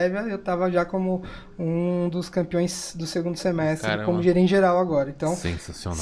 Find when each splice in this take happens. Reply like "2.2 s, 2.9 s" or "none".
none